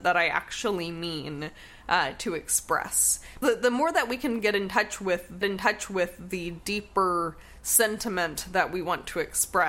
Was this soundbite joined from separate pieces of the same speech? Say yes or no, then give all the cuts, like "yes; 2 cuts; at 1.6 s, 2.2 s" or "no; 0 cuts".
yes; 2 cuts; at 3.4 s, 5.4 s